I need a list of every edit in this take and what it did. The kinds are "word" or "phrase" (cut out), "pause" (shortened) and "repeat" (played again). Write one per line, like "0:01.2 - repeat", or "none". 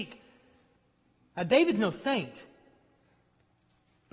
none